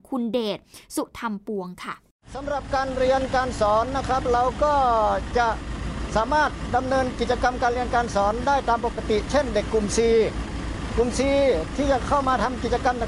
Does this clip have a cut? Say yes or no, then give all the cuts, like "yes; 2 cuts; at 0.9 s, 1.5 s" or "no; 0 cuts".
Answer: no; 0 cuts